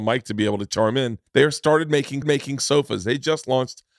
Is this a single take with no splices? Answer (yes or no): no